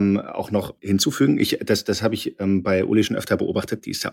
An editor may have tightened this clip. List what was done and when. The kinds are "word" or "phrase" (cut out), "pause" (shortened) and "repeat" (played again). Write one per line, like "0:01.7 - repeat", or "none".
none